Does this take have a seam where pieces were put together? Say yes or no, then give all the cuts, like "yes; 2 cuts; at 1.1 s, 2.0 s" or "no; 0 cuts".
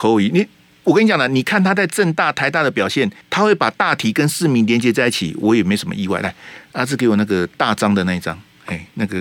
yes; 1 cut; at 3.2 s